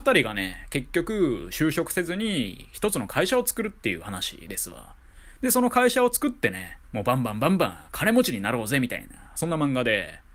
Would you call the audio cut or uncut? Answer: cut